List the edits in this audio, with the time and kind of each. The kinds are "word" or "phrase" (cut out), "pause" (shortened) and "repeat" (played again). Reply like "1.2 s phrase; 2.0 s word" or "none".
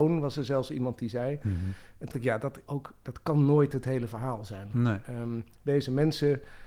2.1 s word; 2.7 s phrase